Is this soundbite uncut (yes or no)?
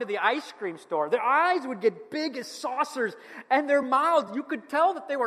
yes